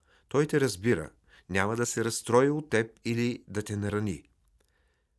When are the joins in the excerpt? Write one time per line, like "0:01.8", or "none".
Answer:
none